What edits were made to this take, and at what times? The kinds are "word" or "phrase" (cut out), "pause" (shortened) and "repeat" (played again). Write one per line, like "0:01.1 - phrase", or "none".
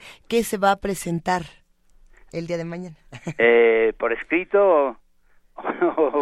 none

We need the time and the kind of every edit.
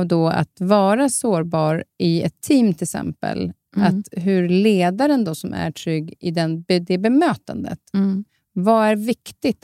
none

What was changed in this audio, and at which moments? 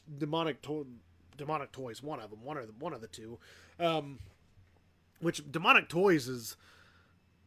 0:01.1 - pause

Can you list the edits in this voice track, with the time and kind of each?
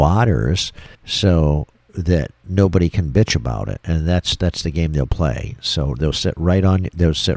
0:00.9 - pause

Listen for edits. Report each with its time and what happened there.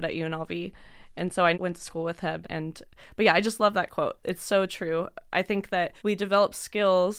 0:01.5 - phrase
0:02.4 - word
0:04.2 - word
0:06.0 - pause

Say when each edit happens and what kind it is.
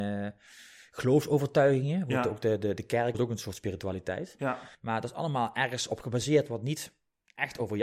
0:03.1 - phrase
0:04.7 - pause

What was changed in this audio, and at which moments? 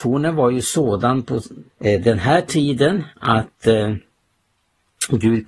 0:01.7 - pause
0:03.1 - pause

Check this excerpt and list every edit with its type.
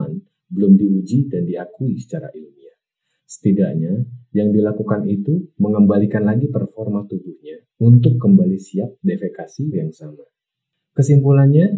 0:07.7 - pause
0:09.7 - phrase

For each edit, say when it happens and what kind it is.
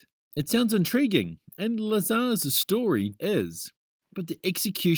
0:03.2 - word

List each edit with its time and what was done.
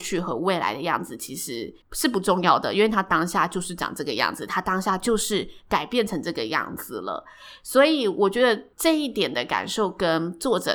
0:01.8 - pause
0:08.7 - pause

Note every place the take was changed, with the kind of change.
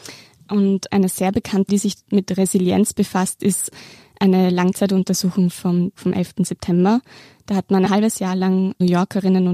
0:01.7 - word
0:06.0 - word
0:07.9 - word

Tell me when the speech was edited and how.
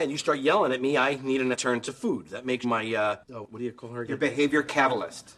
0:01.5 - phrase
0:02.6 - word
0:03.2 - pause

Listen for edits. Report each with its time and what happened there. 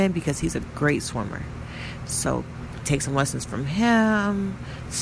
none

